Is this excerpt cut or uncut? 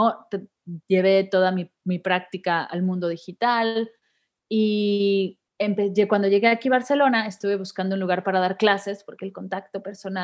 uncut